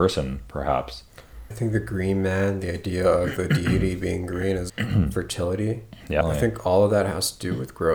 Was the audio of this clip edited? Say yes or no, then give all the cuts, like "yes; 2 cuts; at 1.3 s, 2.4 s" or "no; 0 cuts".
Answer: yes; 3 cuts; at 1.5 s, 4.7 s, 6.2 s